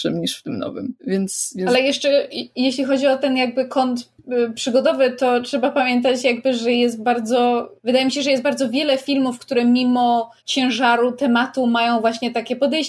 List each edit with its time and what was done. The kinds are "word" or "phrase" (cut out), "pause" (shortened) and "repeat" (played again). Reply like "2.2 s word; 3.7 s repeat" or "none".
1.0 s pause; 7.8 s pause; 10.4 s pause

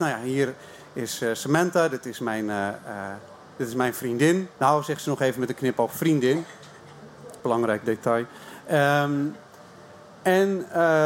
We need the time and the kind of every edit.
4.5 s pause; 7.4 s pause

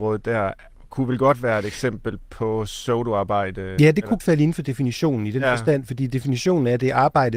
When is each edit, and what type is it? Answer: 4.2 s word

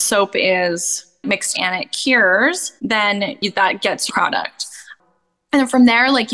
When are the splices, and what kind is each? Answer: 1.5 s word; 2.8 s pause; 4.1 s phrase

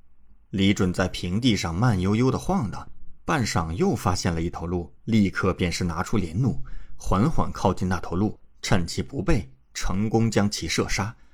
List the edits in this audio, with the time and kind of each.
5.0 s pause; 8.5 s pause

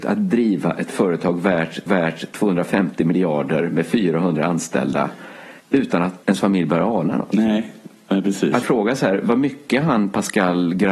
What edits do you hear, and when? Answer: 1.9 s repeat; 5.6 s pause; 6.2 s pause; 8.6 s word

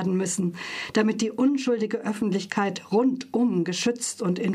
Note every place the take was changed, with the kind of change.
none

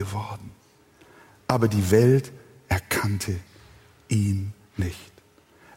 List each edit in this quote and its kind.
none

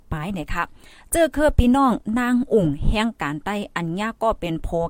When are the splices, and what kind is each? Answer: none

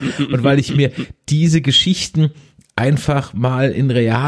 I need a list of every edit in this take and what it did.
none

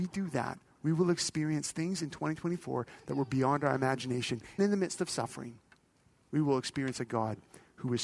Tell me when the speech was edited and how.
4.6 s word

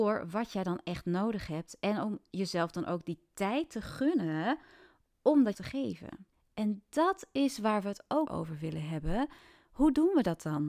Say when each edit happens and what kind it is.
5.5 s word; 6.3 s pause; 8.3 s word

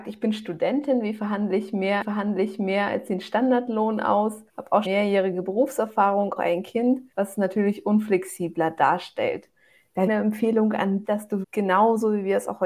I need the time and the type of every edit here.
2.0 s repeat; 4.5 s pause; 4.8 s word; 6.4 s word; 7.1 s pause; 10.1 s phrase; 11.0 s word; 11.4 s word

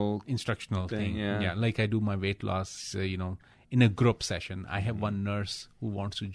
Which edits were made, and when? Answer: none

